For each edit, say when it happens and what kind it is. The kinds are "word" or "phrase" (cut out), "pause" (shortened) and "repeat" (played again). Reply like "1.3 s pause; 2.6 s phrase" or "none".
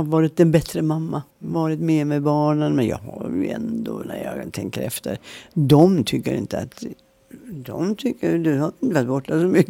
1.3 s pause; 7.4 s pause